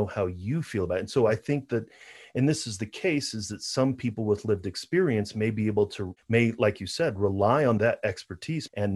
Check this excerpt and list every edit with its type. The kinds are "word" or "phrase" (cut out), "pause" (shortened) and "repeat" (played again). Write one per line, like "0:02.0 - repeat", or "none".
none

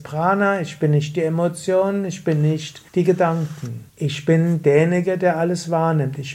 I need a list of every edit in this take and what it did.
0:02.9 - pause
0:03.9 - pause

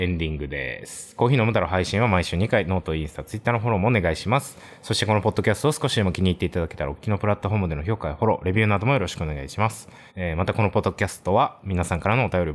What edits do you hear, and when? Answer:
0:10.1 - pause

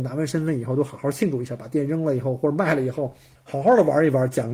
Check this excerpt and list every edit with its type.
0:03.4 - pause

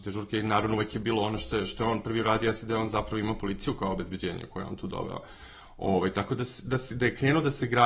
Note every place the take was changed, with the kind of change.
none

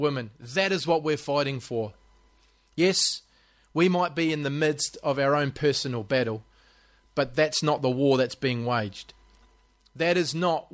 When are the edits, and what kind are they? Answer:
none

